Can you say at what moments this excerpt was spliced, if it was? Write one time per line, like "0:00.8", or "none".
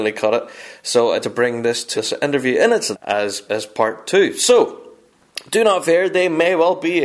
0:01.2
0:01.9
0:02.9
0:03.5